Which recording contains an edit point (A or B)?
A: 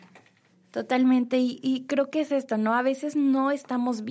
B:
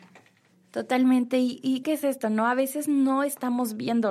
B